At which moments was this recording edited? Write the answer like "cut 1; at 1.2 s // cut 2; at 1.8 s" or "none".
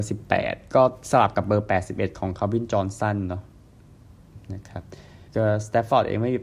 cut 1; at 5.3 s